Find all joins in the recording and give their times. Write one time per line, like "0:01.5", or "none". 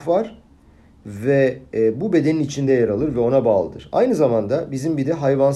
none

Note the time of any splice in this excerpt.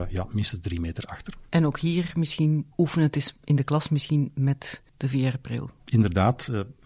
0:01.5
0:02.7
0:04.9

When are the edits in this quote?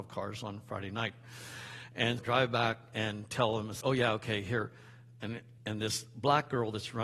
0:02.2
0:03.8
0:05.6

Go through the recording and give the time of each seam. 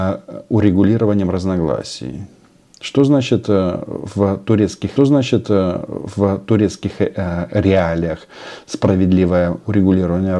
0:05.0

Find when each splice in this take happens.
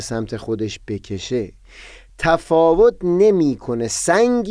none

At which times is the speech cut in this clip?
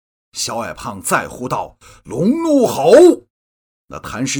0:03.3

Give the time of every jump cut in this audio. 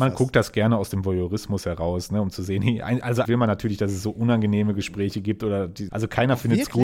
0:03.2
0:05.9

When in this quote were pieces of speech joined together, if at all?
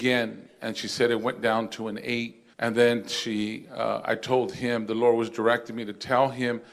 0:02.5

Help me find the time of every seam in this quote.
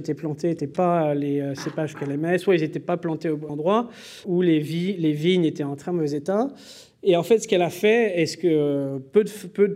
0:03.5
0:04.2

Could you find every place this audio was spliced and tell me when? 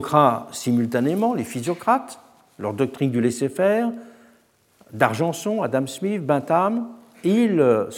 none

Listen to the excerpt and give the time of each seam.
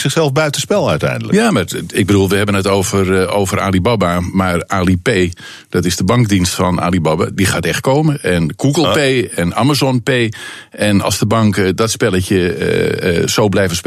none

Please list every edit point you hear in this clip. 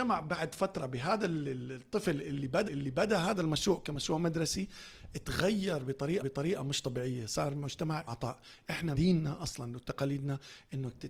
0:02.7
0:06.2
0:08.1
0:08.9

